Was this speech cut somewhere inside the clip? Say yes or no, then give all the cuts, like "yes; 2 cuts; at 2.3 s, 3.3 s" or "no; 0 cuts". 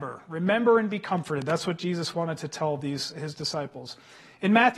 no; 0 cuts